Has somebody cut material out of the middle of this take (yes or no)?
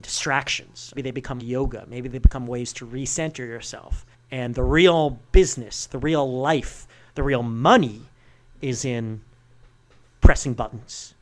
yes